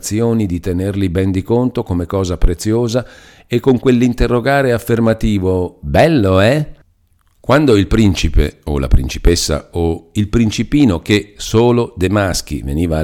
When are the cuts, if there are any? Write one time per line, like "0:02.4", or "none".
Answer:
none